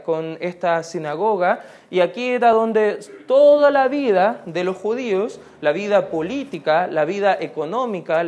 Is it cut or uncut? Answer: uncut